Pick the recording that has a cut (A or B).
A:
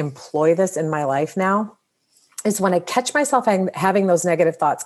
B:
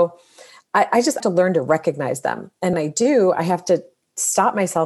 B